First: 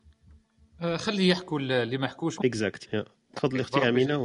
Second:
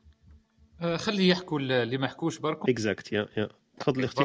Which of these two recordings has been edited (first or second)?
first